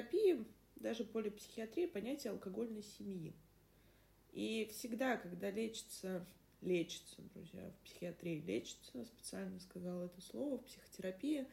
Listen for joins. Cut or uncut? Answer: uncut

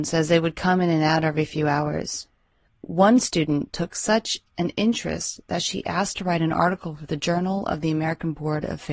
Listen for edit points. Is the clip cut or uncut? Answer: uncut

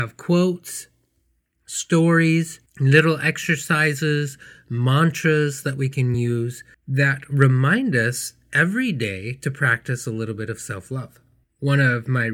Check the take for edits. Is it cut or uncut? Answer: uncut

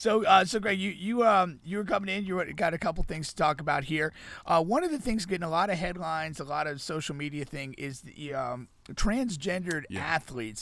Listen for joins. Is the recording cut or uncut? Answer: uncut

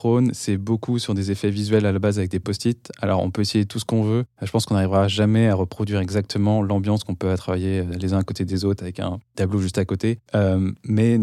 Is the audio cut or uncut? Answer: uncut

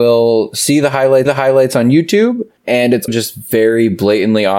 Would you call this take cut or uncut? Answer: cut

